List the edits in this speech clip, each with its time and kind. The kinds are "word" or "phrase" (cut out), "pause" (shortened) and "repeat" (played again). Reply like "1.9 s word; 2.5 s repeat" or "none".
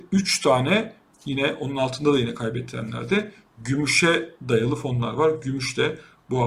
none